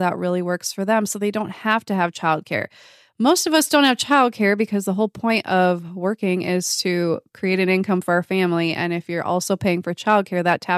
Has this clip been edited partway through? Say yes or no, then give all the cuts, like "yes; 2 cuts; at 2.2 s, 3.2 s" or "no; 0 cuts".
no; 0 cuts